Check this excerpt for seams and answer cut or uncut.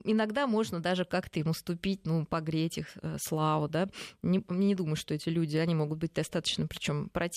uncut